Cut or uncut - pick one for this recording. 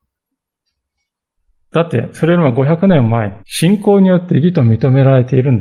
cut